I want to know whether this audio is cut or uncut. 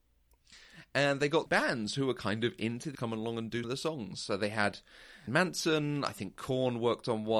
cut